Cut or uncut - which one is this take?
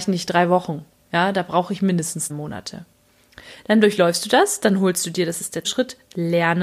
cut